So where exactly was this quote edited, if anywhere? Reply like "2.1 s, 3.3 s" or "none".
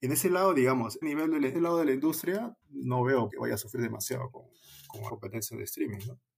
1.0 s, 1.5 s, 2.6 s, 3.3 s, 5.1 s